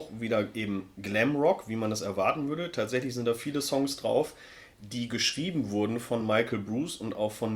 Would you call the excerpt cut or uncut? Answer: uncut